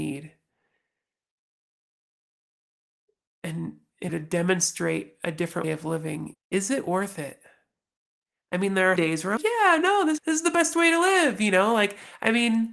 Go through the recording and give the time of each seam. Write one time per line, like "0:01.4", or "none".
0:04.1
0:05.6
0:06.3
0:09.0
0:09.4
0:10.2